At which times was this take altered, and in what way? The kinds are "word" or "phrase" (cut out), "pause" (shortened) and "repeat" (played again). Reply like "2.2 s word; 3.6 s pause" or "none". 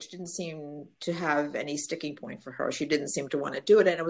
none